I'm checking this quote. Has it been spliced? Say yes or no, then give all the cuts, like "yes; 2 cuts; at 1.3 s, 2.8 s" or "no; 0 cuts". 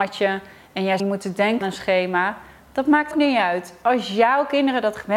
yes; 3 cuts; at 1.0 s, 1.6 s, 3.1 s